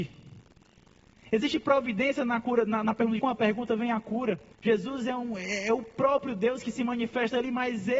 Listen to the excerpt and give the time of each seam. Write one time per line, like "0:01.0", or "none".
0:03.2
0:04.5